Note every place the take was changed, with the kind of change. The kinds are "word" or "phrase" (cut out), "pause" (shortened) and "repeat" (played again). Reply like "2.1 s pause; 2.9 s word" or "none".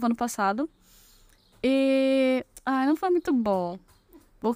none